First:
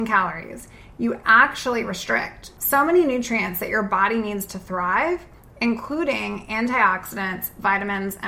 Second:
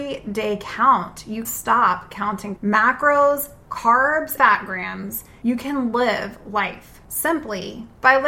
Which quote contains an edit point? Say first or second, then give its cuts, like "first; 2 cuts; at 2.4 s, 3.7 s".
second; 3 cuts; at 1.4 s, 2.6 s, 4.4 s